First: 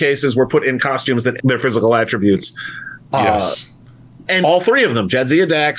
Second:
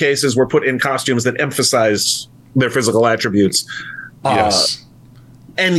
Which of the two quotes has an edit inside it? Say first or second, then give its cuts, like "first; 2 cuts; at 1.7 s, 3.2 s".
first; 3 cuts; at 1.4 s, 3.8 s, 4.4 s